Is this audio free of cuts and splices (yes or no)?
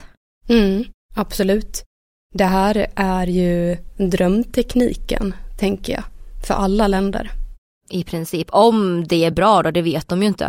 yes